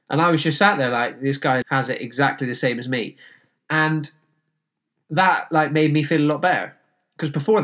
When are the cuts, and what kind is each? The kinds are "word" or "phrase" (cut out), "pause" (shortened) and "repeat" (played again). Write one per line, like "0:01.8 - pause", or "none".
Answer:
0:01.6 - word